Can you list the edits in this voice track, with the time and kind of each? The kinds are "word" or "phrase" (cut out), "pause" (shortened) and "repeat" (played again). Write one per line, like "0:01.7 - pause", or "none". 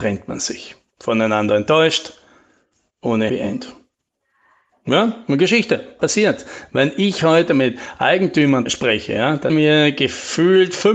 0:03.3 - word
0:06.0 - word
0:08.7 - word
0:09.5 - word